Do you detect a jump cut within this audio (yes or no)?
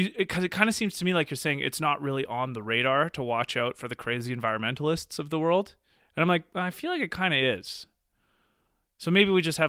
no